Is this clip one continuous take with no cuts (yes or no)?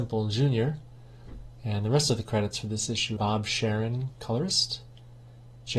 no